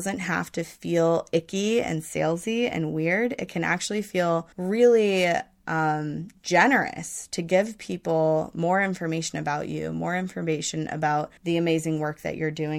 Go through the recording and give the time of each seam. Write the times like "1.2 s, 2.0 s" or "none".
4.5 s, 11.4 s